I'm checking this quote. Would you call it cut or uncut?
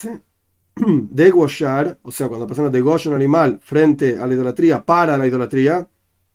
uncut